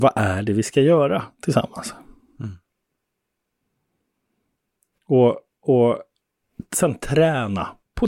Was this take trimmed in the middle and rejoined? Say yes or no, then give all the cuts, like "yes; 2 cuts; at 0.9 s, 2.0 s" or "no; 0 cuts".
no; 0 cuts